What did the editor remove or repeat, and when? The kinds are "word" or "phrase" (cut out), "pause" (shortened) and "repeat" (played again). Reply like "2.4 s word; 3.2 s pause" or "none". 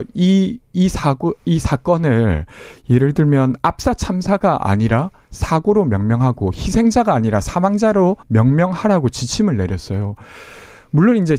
8.2 s pause

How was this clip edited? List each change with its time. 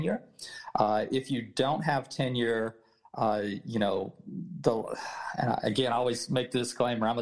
none

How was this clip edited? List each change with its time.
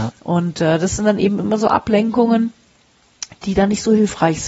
none

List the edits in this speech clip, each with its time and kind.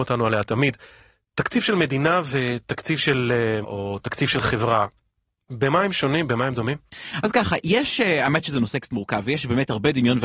3.6 s word

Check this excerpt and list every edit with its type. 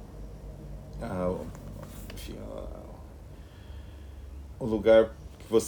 4.5 s word

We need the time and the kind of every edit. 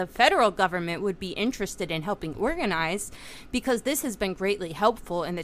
none

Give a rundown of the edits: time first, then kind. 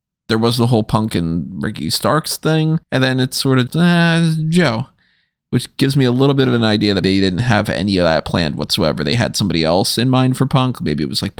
2.8 s pause; 3.7 s word; 7.0 s word

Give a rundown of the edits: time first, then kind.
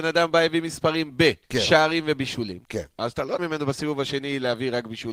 1.4 s pause; 2.6 s pause; 3.4 s word

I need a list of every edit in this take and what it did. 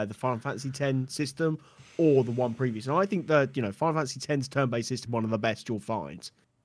5.1 s word

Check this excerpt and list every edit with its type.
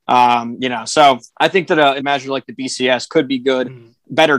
1.3 s pause; 2.0 s word

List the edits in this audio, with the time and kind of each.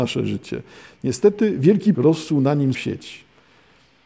1.9 s word; 2.7 s word

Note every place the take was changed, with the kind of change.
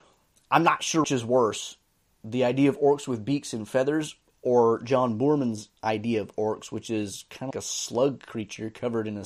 1.0 s word; 5.8 s pause; 7.5 s word

